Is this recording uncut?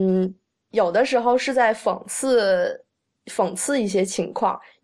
no; 1 cut; at 3.1 s

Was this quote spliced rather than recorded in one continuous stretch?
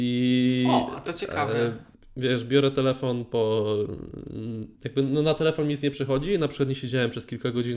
yes; 1 cut; at 4.7 s

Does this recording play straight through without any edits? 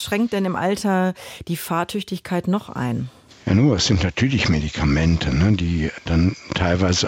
yes; 0 cuts

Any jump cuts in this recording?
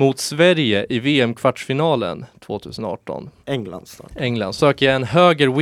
yes; 2 cuts; at 3.4 s, 4.6 s

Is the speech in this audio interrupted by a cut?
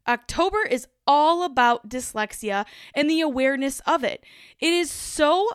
no; 0 cuts

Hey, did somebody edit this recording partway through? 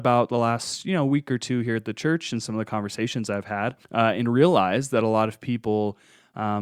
yes; 1 cut; at 3.8 s

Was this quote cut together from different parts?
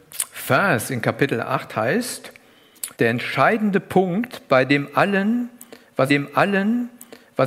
yes; 2 cuts; at 2.9 s, 6.1 s

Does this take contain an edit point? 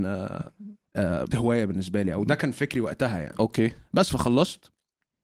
yes; 1 cut; at 1.3 s

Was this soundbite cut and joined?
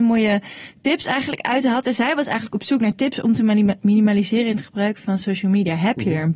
no; 0 cuts

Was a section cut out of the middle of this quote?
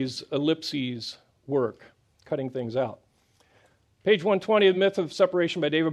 no; 0 cuts

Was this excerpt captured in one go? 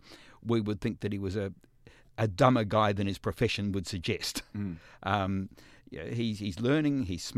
no; 1 cut; at 2.1 s

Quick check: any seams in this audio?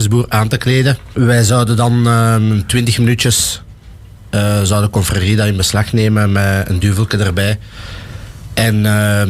no; 0 cuts

